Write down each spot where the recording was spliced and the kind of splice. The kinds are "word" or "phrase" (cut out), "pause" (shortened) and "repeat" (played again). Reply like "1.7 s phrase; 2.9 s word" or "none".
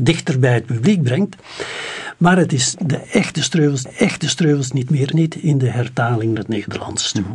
2.7 s word; 3.9 s repeat; 5.1 s word; 6.4 s word